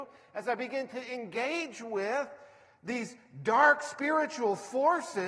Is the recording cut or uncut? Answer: uncut